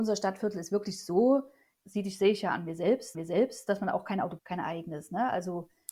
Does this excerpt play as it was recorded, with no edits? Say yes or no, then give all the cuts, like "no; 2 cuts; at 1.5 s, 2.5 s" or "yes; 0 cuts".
no; 3 cuts; at 1.7 s, 3.1 s, 4.4 s